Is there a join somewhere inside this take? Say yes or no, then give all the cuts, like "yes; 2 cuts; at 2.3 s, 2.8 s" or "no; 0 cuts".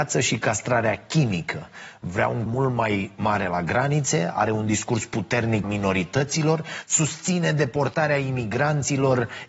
yes; 2 cuts; at 2.5 s, 5.6 s